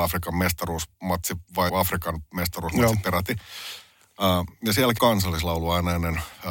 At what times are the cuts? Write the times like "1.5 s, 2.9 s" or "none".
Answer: 1.7 s, 5.0 s